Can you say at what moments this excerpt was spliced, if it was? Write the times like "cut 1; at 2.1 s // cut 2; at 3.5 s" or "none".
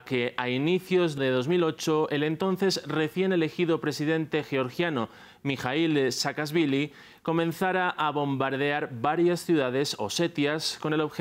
cut 1; at 1.2 s